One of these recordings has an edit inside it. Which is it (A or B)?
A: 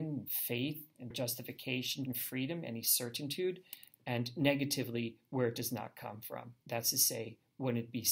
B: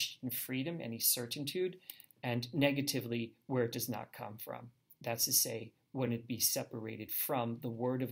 A